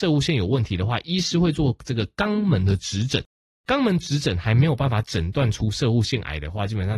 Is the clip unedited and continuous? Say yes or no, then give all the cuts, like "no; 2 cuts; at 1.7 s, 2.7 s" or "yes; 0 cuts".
yes; 0 cuts